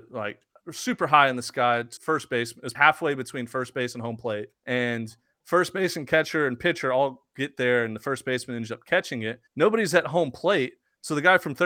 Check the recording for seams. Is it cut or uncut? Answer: cut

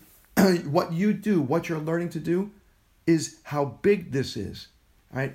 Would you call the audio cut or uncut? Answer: uncut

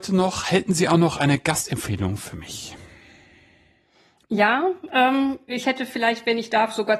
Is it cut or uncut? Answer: uncut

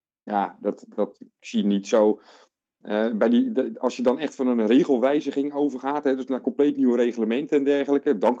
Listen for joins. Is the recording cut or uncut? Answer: uncut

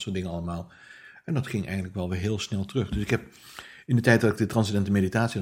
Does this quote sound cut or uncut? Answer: uncut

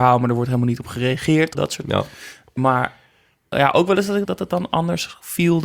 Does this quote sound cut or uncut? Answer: cut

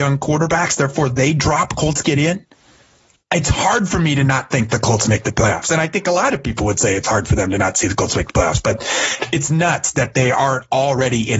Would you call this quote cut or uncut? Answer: uncut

